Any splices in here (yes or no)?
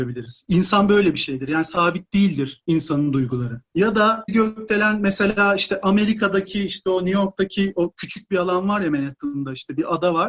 yes